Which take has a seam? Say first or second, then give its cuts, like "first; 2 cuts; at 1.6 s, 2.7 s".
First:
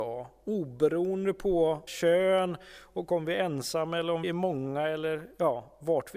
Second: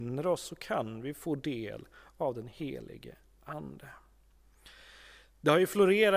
first; 2 cuts; at 1.9 s, 4.2 s